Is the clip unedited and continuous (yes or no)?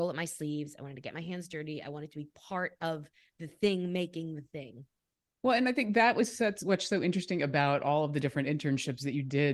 yes